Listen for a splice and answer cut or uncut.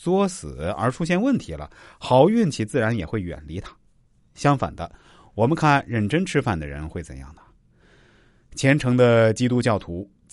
uncut